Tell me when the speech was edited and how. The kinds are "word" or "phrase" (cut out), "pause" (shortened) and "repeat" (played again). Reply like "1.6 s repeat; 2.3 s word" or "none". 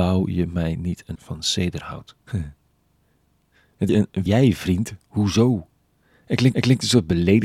1.2 s word; 2.2 s pause; 3.9 s phrase; 4.3 s phrase; 6.5 s repeat